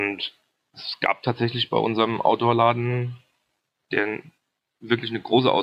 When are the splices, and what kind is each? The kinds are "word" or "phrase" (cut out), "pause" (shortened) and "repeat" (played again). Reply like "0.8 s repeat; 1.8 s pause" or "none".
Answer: none

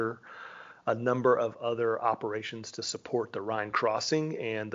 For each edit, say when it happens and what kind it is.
none

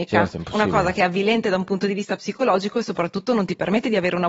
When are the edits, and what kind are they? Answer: none

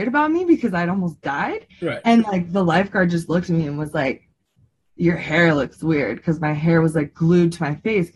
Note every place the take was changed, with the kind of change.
1.7 s pause

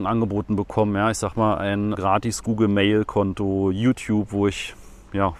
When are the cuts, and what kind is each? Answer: 1.9 s word

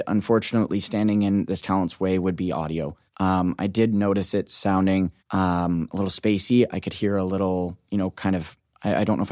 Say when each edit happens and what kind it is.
3.1 s pause; 5.2 s pause

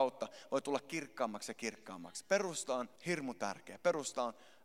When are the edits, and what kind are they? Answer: 3.0 s pause

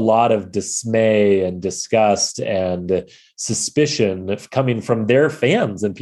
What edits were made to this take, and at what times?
none

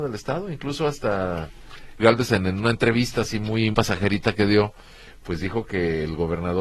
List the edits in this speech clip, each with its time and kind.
2.0 s word; 3.7 s word

